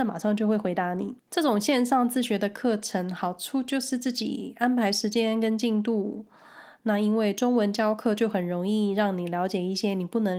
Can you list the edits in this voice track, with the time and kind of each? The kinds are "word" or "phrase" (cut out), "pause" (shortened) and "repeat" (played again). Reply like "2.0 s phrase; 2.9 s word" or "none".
1.2 s pause